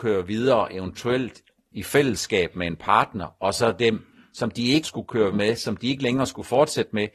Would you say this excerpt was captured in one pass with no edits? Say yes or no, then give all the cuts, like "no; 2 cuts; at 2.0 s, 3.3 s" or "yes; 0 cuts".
no; 2 cuts; at 4.8 s, 5.3 s